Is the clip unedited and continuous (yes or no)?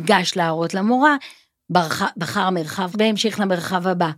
no